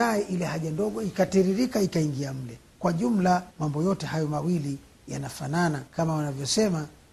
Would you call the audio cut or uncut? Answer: cut